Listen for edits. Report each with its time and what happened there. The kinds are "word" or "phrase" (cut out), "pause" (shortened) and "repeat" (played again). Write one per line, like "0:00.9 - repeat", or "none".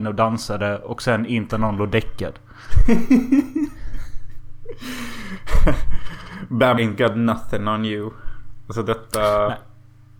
0:01.5 - word
0:06.8 - word